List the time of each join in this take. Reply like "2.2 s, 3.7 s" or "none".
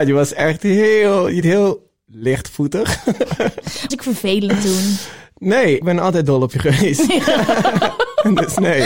1.4 s, 3.9 s, 5.8 s